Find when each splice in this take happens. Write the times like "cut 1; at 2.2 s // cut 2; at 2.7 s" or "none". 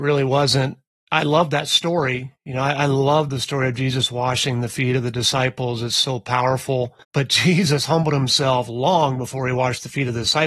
cut 1; at 0.9 s // cut 2; at 2.4 s // cut 3; at 7.0 s